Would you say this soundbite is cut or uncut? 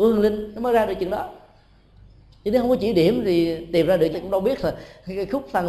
cut